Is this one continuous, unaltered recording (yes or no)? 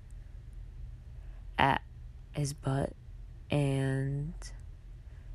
yes